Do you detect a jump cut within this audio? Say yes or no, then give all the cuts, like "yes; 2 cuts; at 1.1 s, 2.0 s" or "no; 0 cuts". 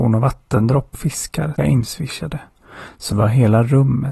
yes; 3 cuts; at 0.9 s, 1.6 s, 3.1 s